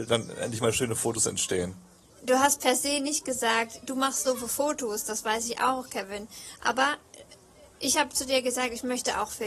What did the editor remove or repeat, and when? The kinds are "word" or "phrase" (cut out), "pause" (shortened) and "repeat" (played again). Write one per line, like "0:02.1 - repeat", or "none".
none